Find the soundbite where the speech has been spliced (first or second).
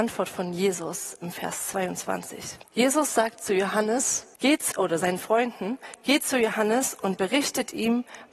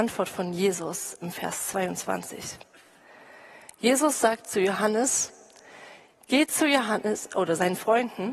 first